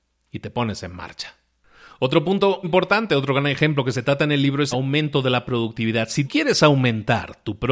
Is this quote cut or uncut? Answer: cut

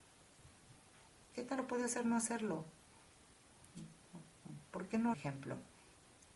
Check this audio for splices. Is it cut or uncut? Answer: cut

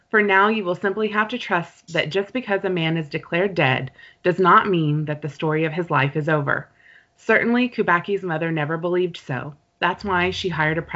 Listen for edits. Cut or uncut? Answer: uncut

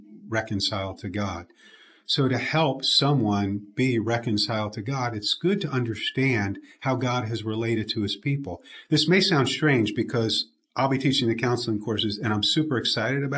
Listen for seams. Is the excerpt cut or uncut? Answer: uncut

